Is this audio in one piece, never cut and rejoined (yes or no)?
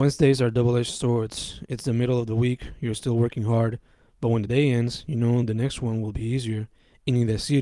yes